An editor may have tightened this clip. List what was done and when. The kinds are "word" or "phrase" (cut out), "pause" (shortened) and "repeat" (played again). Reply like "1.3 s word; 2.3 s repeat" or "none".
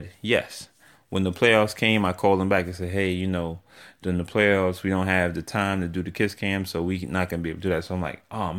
none